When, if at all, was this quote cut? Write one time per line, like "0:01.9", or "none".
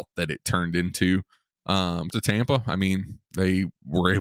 0:02.1
0:03.3